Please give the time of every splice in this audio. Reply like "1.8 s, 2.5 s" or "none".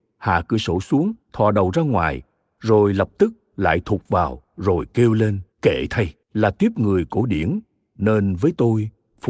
1.2 s, 5.5 s, 6.2 s